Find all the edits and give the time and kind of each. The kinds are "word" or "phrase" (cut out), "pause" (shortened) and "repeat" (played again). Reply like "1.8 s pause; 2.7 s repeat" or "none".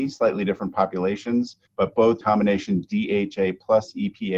1.7 s pause; 2.2 s word